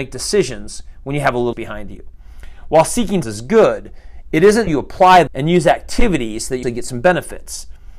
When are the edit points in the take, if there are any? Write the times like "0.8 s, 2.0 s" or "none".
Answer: 1.5 s, 3.2 s, 4.7 s, 5.3 s, 6.6 s